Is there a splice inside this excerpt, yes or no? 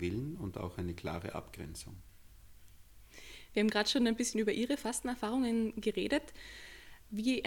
no